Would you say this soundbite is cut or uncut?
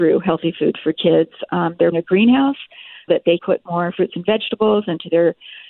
cut